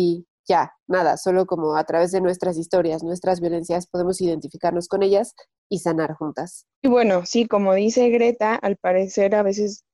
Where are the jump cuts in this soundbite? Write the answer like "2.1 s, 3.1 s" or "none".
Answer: 6.7 s